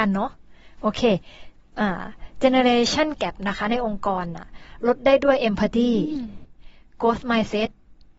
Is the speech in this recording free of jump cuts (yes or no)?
yes